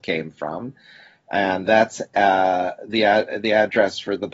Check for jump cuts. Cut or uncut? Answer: cut